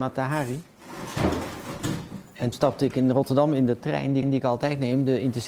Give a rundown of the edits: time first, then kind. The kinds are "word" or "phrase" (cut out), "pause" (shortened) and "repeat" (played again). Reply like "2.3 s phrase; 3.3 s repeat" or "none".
2.5 s word; 4.2 s repeat